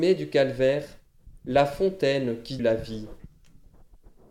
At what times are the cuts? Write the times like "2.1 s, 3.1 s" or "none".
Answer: 2.6 s